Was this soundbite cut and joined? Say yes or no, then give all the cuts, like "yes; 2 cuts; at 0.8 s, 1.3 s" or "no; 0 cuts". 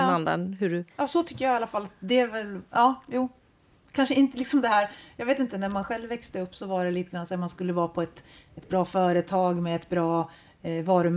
yes; 1 cut; at 0.9 s